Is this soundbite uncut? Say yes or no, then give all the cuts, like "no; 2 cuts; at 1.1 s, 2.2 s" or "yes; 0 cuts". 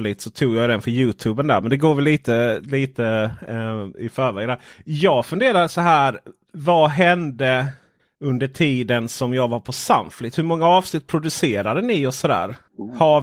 yes; 0 cuts